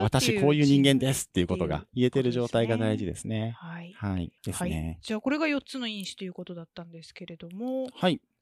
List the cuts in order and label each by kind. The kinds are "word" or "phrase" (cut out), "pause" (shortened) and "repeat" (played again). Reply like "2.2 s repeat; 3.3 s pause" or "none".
4.4 s pause